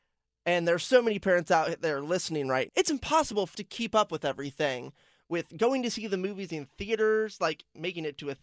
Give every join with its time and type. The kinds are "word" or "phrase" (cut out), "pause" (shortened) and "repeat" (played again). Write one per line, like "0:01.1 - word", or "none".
0:02.7 - word
0:03.5 - word